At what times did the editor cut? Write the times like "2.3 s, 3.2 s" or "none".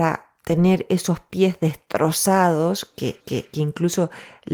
3.2 s

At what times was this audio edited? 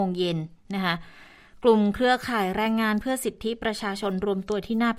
none

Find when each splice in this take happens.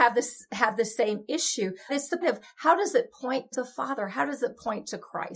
1.9 s, 2.2 s, 3.5 s

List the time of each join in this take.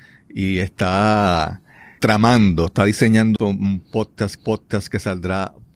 2.0 s, 3.4 s, 4.4 s

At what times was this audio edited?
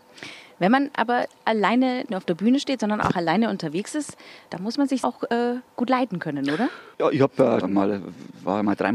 2.1 s, 4.5 s, 5.0 s, 5.7 s, 6.9 s, 7.6 s

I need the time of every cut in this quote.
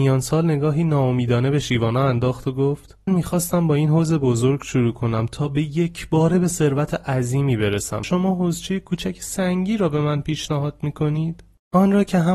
3.1 s, 8.0 s

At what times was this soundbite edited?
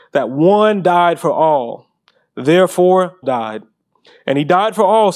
3.2 s

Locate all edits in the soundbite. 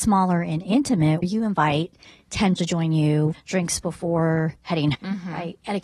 1.2 s, 2.6 s, 3.3 s, 4.9 s

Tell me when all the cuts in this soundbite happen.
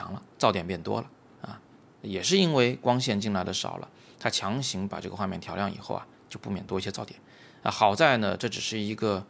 none

